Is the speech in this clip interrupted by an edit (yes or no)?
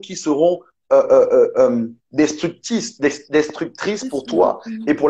yes